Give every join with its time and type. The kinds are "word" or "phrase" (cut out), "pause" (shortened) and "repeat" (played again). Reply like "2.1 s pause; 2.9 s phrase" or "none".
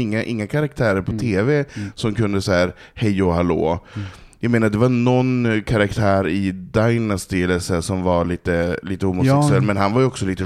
none